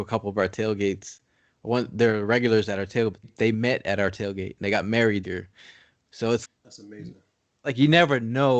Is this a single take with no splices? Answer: no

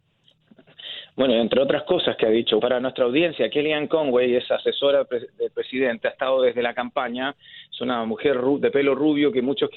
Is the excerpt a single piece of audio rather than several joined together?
no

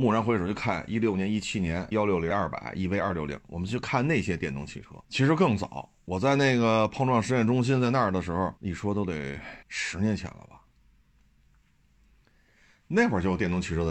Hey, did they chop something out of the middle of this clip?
yes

